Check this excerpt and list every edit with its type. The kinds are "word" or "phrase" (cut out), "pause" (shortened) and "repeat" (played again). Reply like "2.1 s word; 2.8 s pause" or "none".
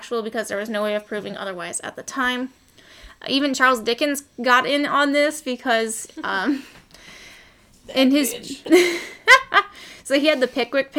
none